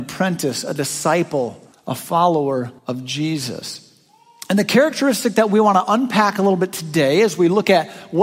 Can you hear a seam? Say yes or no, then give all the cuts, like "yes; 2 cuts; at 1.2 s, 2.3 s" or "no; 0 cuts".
yes; 2 cuts; at 1.7 s, 2.8 s